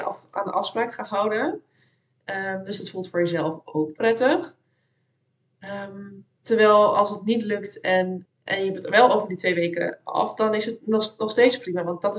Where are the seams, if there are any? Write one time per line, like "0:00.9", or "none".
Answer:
0:08.3
0:10.0